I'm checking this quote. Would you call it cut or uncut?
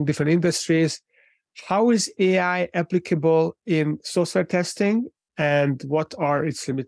uncut